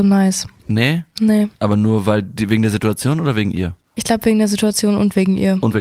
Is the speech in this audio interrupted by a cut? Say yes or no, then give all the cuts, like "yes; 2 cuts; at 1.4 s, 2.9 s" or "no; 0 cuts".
yes; 1 cut; at 1.6 s